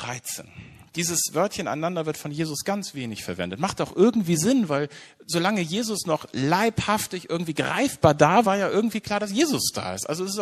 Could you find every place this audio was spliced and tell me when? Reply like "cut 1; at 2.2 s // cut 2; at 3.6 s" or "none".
cut 1; at 8.4 s